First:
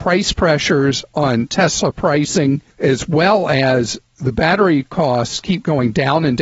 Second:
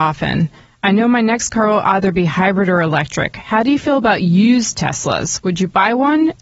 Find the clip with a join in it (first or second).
first